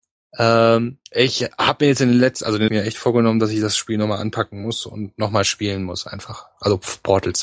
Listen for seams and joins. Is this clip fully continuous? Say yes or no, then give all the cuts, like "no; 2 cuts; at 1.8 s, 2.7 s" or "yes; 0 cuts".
no; 2 cuts; at 1.1 s, 2.7 s